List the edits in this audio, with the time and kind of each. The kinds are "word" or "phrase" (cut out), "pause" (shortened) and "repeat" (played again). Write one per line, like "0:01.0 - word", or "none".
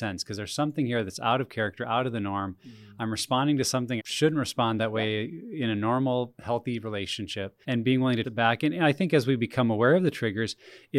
0:04.0 - word
0:07.6 - pause
0:08.2 - word